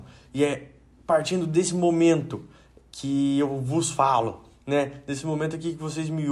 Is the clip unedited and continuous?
yes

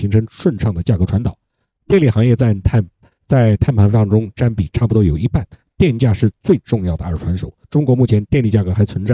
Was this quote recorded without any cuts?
no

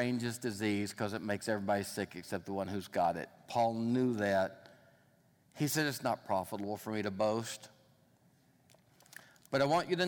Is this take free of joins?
yes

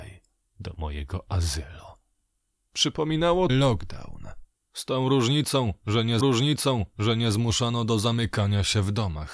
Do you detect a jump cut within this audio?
yes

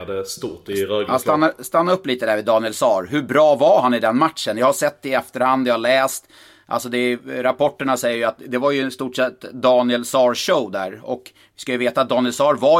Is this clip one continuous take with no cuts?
yes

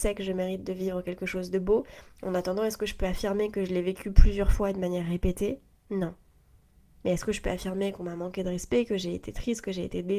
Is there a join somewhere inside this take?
yes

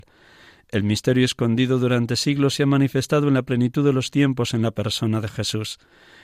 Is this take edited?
no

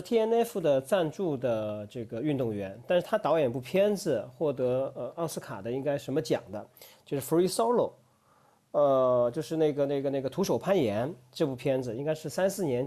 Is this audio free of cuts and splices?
yes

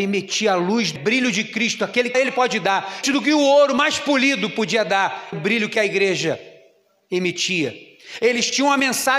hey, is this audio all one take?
no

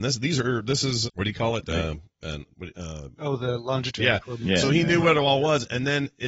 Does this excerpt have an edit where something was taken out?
yes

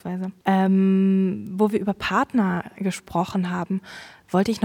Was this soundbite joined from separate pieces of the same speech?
no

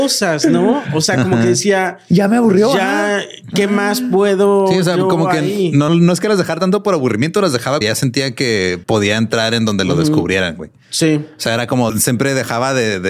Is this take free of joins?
no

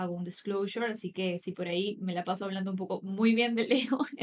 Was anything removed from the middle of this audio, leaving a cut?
no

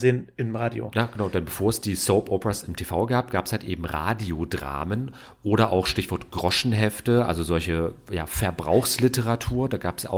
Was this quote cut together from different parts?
no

